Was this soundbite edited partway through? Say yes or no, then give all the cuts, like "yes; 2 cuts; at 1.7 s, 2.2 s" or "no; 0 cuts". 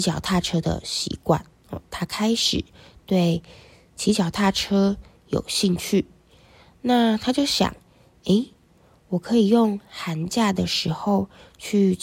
no; 0 cuts